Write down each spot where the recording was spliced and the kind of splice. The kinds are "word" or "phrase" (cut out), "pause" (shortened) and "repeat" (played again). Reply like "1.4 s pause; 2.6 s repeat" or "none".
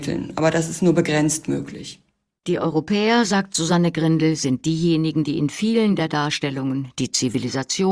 none